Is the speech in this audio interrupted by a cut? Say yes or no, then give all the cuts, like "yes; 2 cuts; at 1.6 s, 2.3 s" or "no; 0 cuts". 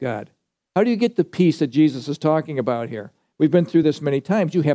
no; 0 cuts